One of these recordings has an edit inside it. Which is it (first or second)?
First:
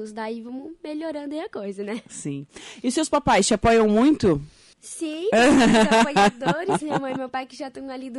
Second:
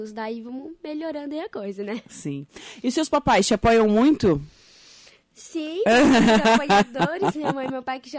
first